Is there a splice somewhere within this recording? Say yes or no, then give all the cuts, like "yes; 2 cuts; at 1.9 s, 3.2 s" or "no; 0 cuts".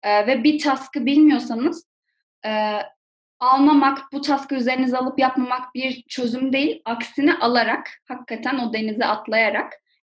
no; 0 cuts